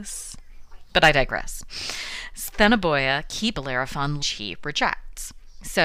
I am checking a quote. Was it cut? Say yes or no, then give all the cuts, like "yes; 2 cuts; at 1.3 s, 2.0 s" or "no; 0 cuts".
yes; 2 cuts; at 3.5 s, 4.2 s